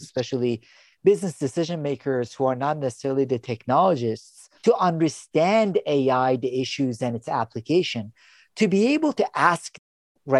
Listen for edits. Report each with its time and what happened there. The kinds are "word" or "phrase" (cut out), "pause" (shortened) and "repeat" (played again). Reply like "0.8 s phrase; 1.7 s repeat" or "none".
4.6 s pause

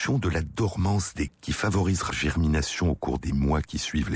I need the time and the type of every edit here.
1.3 s word; 2.1 s word

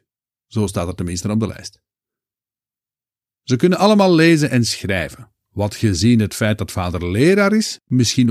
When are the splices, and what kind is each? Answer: none

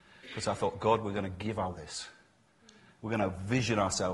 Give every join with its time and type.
1.7 s phrase

